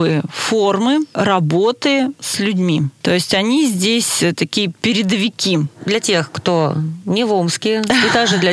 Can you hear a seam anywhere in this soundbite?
no; 0 cuts

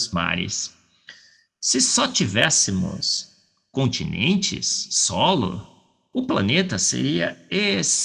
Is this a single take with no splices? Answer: yes; 0 cuts

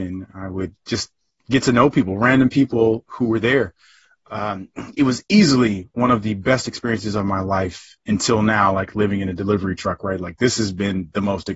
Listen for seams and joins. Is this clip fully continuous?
yes; 0 cuts

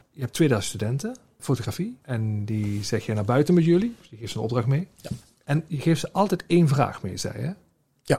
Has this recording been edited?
no; 0 cuts

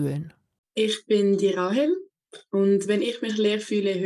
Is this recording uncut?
yes; 0 cuts

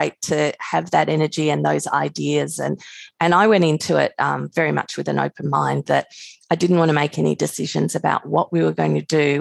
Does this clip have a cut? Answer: no; 0 cuts

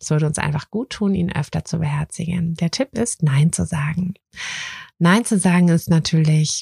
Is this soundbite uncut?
yes; 0 cuts

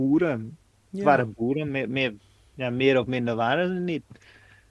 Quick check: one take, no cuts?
yes; 0 cuts

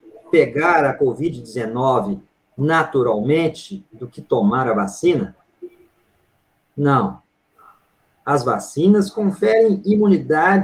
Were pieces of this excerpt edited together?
no; 0 cuts

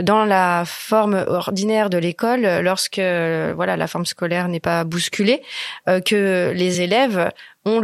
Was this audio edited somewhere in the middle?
no; 0 cuts

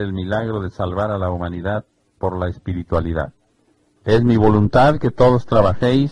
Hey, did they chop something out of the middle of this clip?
no; 0 cuts

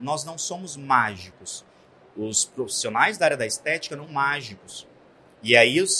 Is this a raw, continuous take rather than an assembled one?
no; 1 cut; at 4.1 s

